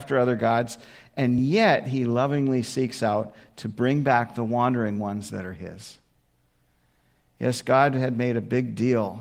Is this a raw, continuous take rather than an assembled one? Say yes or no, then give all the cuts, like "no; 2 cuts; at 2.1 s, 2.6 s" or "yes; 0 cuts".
yes; 0 cuts